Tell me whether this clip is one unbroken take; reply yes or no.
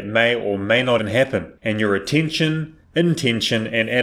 no